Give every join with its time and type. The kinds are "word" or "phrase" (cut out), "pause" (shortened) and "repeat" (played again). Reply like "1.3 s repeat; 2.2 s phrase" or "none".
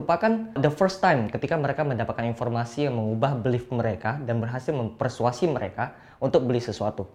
none